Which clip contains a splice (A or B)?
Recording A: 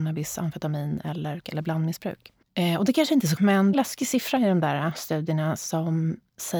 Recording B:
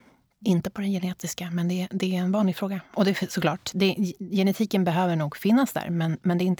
A